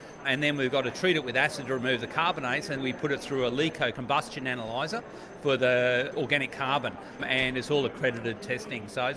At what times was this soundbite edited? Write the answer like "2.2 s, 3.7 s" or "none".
2.8 s